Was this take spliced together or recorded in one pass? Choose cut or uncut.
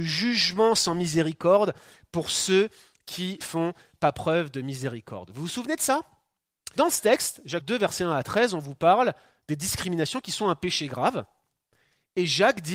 cut